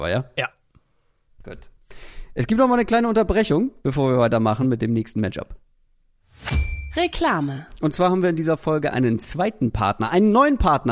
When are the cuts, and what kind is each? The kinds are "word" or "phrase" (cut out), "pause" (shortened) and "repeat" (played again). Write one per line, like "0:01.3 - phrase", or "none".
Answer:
none